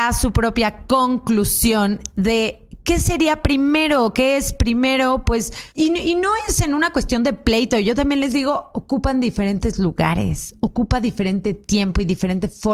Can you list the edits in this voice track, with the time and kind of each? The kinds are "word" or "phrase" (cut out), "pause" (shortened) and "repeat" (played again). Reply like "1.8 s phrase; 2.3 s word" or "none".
5.7 s pause

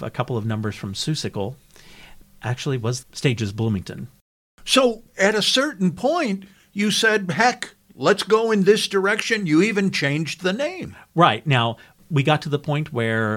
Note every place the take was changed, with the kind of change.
3.0 s phrase

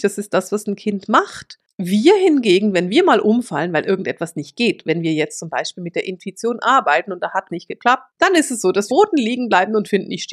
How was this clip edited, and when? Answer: 7.5 s word; 8.1 s pause; 8.9 s phrase

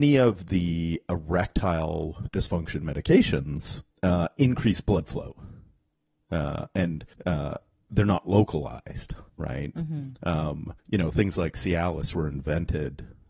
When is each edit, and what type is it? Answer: 3.9 s pause; 7.1 s pause; 9.3 s pause; 10.8 s pause

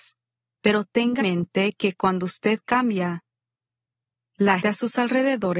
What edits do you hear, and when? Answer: 1.2 s word; 4.6 s word

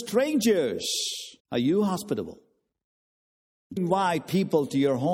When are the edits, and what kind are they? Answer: 1.4 s pause; 3.8 s word

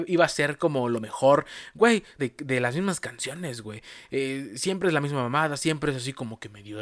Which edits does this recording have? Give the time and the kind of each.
2.2 s phrase

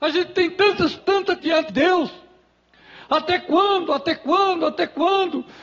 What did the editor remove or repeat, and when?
1.0 s word; 1.4 s word; 1.7 s word

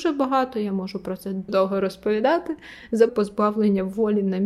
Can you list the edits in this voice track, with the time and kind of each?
1.5 s word; 3.1 s phrase

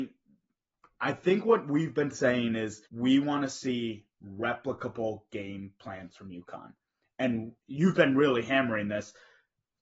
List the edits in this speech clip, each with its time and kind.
2.9 s pause

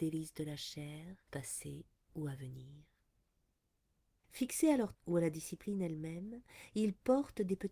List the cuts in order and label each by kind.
1.3 s word; 4.9 s word

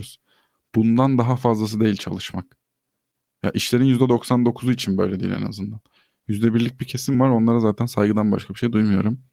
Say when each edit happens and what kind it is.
none

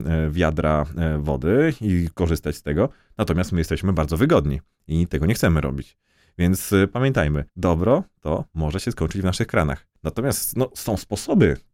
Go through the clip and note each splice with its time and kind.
7.5 s pause

